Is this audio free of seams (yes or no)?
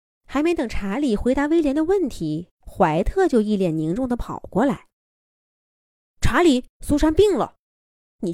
no